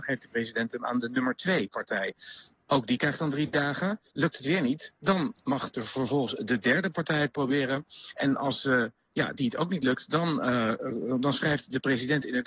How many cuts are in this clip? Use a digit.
1